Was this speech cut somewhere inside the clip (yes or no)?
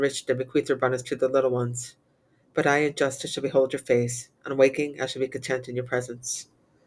no